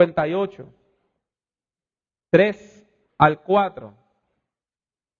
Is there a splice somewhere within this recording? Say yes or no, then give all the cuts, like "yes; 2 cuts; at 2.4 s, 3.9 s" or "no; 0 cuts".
no; 0 cuts